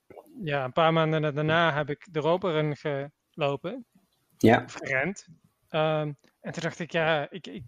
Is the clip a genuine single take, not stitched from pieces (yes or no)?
yes